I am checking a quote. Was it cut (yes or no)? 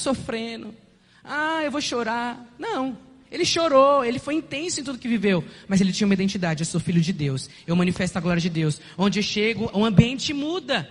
no